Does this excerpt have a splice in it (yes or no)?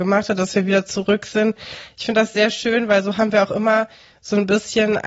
no